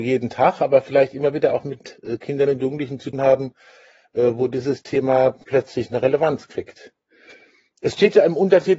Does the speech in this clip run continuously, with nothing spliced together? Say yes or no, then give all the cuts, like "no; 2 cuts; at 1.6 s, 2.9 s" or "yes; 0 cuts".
no; 1 cut; at 3.1 s